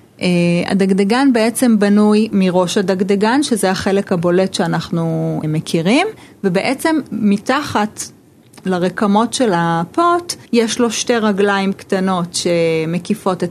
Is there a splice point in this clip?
yes; 3 cuts; at 2.3 s, 5.4 s, 10.5 s

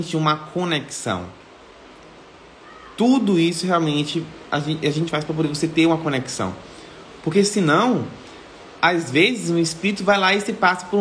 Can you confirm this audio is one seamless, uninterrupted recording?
yes; 0 cuts

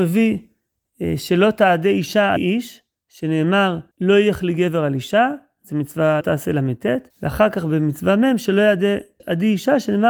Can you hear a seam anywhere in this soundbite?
yes; 5 cuts; at 2.4 s, 3.9 s, 6.2 s, 7.1 s, 9.2 s

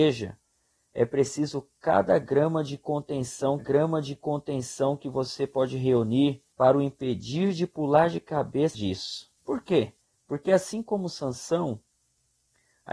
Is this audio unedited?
no; 5 cuts; at 3.6 s, 6.5 s, 8.7 s, 9.4 s, 10.0 s

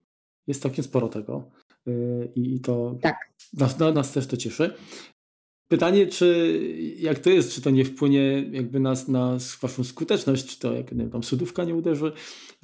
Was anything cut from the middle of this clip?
yes; 1 cut; at 3.9 s

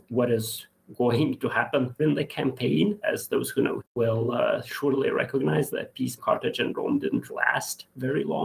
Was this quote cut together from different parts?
yes; 6 cuts; at 2.0 s, 3.0 s, 3.8 s, 5.7 s, 6.2 s, 7.3 s

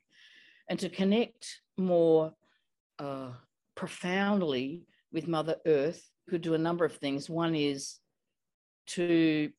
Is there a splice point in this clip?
yes; 1 cut; at 6.3 s

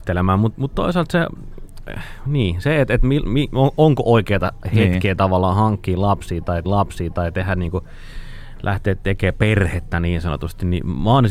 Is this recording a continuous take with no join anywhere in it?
no; 1 cut; at 6.6 s

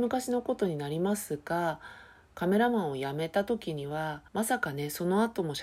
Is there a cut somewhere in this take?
yes; 1 cut; at 4.3 s

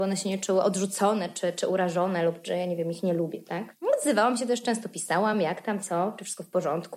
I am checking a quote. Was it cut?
no; 0 cuts

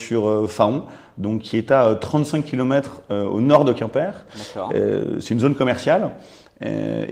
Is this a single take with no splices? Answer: yes; 0 cuts

